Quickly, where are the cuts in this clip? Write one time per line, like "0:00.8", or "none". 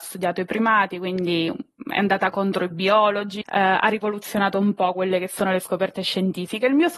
0:03.4